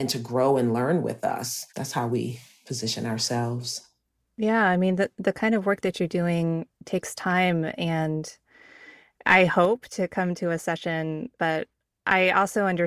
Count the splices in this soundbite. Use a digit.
1